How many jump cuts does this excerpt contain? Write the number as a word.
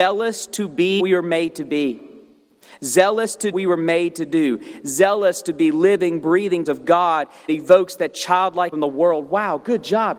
five